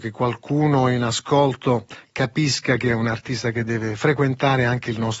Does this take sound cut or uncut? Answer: uncut